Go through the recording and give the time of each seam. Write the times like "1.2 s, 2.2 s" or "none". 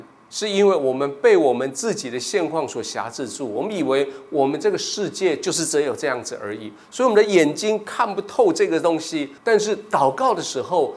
9.4 s